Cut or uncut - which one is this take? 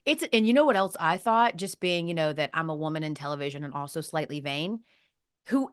uncut